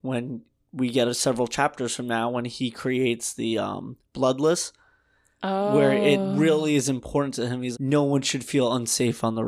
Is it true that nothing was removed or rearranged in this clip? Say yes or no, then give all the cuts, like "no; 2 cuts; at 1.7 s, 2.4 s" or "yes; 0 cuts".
no; 1 cut; at 7.7 s